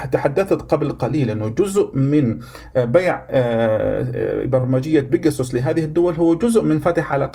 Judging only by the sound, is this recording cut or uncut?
uncut